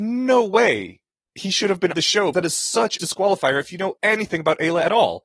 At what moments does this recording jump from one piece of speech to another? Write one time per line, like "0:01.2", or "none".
0:01.9
0:02.3
0:03.0
0:04.0